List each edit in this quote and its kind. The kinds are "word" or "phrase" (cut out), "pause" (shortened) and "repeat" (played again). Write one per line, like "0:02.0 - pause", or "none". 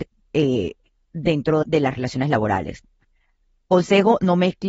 0:01.6 - word